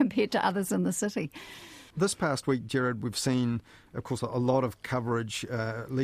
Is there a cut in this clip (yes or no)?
no